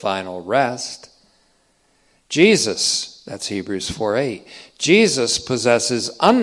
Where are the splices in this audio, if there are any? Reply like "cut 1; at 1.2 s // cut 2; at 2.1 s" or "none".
none